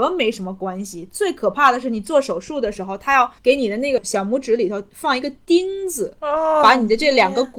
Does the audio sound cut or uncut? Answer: cut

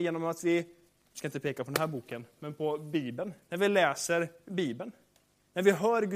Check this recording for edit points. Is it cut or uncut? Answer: uncut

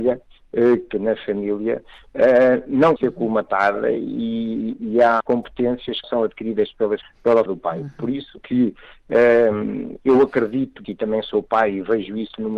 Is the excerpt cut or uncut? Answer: cut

